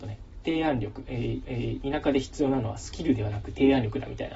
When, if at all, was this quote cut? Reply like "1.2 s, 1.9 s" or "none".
1.4 s